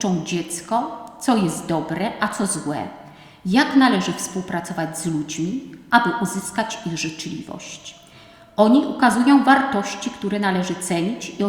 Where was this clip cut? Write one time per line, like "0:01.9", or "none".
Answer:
none